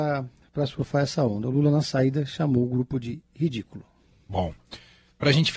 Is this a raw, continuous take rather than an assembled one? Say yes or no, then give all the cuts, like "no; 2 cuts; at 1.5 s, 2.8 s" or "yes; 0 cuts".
yes; 0 cuts